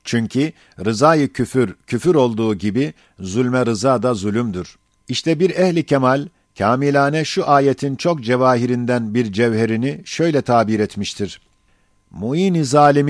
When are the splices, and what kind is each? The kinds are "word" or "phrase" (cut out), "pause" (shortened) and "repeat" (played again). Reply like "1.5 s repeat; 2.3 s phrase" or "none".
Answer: none